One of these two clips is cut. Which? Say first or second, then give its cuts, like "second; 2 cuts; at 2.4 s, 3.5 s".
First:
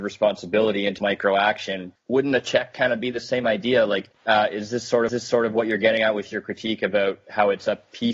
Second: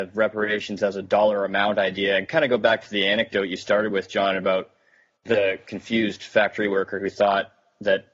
first; 4 cuts; at 1.0 s, 2.0 s, 4.1 s, 5.1 s